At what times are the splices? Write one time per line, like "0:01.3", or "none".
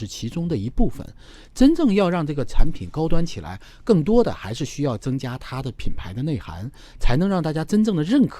none

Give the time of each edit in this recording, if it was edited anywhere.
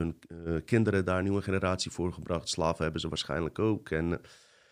none

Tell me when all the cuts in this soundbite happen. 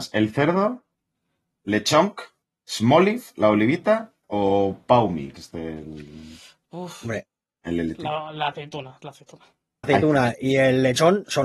0:05.4
0:09.8

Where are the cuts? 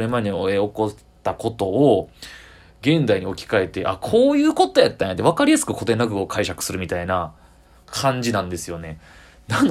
none

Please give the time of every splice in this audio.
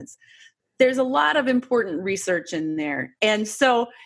none

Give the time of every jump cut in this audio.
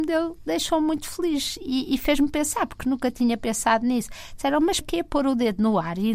0:04.8

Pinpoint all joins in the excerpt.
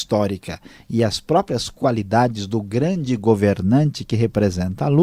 none

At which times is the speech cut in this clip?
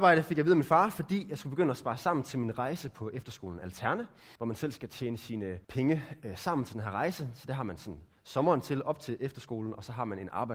0:04.4
0:05.6

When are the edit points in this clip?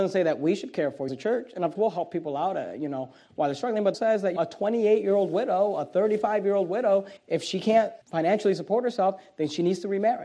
0:01.1
0:01.7
0:03.9
0:04.4
0:07.2
0:08.0

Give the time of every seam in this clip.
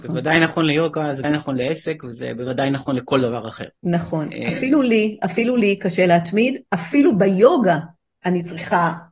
0:01.2
0:03.8

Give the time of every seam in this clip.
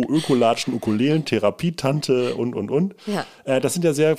none

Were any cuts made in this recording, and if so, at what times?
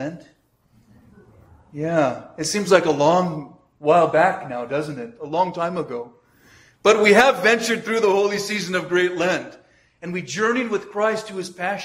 none

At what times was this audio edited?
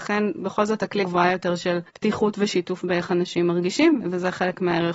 0:01.0
0:01.9
0:04.0

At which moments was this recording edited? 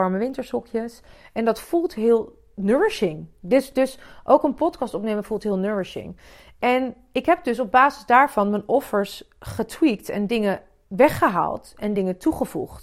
none

